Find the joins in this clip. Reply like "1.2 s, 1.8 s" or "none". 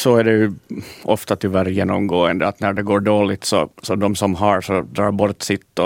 3.7 s